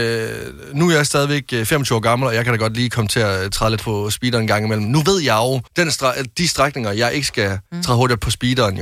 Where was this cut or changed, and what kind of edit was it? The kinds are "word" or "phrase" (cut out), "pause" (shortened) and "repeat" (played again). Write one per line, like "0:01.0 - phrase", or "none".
0:03.8 - word
0:05.7 - pause
0:07.7 - pause